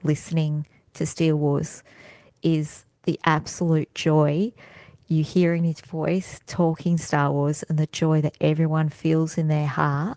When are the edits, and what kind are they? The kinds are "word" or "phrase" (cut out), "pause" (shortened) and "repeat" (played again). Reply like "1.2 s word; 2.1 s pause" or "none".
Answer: none